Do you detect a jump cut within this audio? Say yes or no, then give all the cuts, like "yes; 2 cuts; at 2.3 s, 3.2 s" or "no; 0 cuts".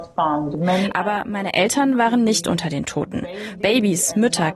no; 0 cuts